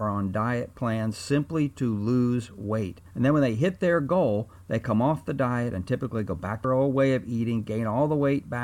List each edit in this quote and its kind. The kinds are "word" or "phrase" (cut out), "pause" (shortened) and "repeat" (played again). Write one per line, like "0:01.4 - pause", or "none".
0:03.1 - pause
0:06.6 - word